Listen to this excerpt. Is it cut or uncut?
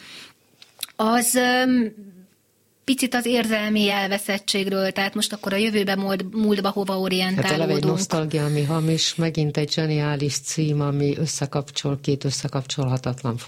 uncut